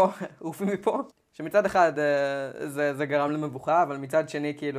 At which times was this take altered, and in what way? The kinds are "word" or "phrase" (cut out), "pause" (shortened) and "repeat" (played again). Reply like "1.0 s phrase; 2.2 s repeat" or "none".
none